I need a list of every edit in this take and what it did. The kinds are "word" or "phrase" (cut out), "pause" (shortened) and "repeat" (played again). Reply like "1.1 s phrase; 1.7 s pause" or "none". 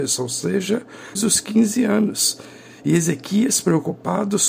1.1 s word